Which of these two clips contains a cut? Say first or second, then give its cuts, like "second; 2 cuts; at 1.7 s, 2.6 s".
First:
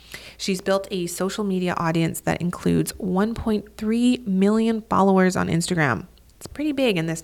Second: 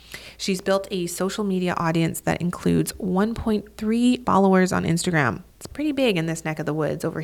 second; 2 cuts; at 4.2 s, 5.5 s